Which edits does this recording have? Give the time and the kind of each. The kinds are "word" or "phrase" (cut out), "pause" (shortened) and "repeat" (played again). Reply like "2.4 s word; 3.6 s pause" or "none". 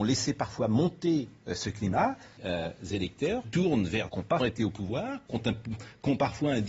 2.4 s word; 3.4 s word; 4.1 s word; 4.4 s word